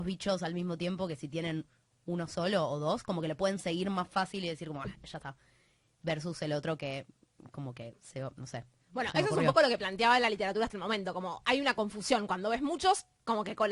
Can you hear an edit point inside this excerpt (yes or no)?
no